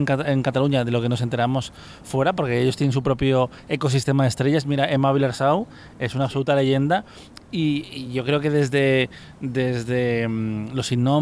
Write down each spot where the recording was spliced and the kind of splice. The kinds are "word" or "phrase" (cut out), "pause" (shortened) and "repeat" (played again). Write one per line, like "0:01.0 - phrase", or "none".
none